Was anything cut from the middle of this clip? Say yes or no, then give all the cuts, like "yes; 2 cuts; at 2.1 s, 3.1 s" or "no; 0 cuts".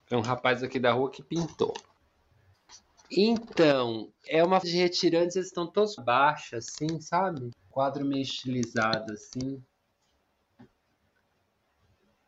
yes; 3 cuts; at 4.6 s, 6.0 s, 7.6 s